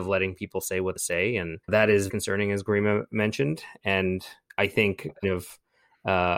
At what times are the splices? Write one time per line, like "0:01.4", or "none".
0:01.0
0:01.6
0:02.1
0:05.2